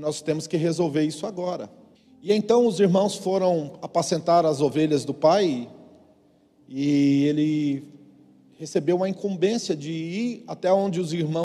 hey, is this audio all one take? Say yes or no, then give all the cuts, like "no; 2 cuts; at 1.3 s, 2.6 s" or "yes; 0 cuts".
no; 1 cut; at 1.9 s